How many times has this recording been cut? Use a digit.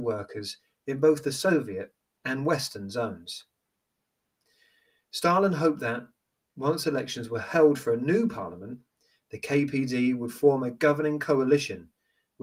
0